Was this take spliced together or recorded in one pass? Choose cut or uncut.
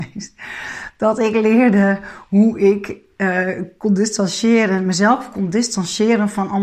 uncut